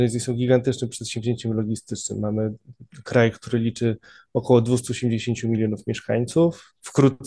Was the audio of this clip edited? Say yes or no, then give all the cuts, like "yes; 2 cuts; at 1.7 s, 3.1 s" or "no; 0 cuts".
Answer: no; 0 cuts